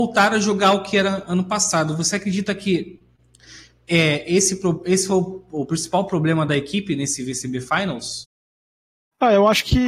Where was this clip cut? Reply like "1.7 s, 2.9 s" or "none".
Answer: none